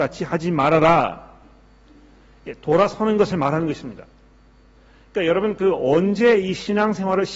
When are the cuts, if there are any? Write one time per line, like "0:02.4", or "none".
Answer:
none